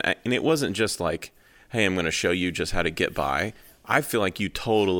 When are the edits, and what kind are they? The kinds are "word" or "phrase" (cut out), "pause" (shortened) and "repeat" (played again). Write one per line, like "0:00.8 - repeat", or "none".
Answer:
none

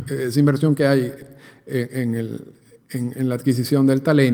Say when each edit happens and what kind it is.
none

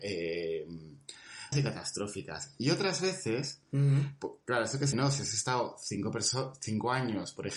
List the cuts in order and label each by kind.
0:01.5 - word
0:04.9 - word

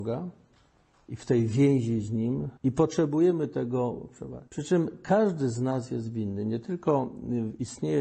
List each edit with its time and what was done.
0:02.6 - pause
0:04.5 - pause

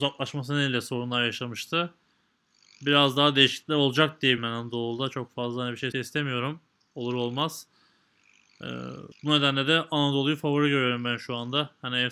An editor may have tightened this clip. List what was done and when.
0:04.4 - word
0:05.9 - word
0:09.1 - pause

